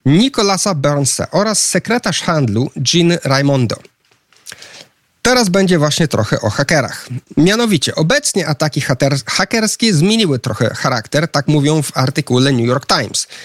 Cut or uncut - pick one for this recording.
uncut